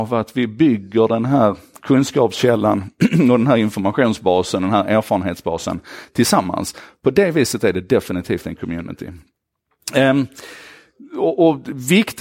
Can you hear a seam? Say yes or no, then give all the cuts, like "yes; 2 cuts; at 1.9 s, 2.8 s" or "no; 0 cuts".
no; 0 cuts